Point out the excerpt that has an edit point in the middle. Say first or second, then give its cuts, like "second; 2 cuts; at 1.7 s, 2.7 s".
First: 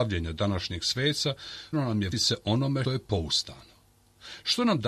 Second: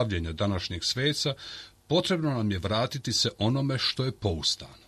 first; 3 cuts; at 1.7 s, 2.1 s, 2.8 s